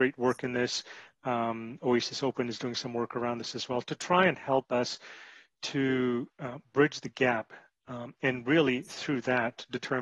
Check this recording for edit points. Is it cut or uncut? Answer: uncut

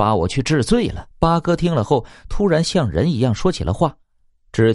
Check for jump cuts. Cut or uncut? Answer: cut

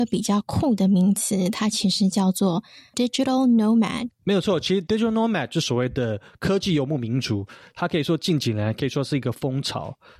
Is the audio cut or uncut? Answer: uncut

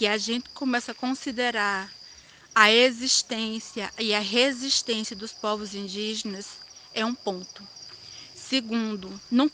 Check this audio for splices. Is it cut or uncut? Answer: uncut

